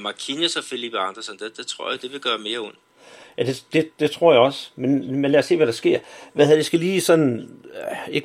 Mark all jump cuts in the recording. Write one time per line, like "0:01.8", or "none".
none